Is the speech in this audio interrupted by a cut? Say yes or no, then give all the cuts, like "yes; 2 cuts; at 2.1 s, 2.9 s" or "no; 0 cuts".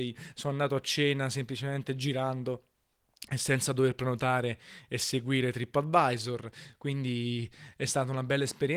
no; 0 cuts